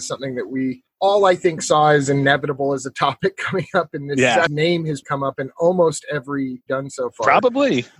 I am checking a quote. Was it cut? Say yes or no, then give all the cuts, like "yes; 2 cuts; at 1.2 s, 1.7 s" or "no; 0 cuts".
yes; 3 cuts; at 4.5 s, 5.0 s, 6.7 s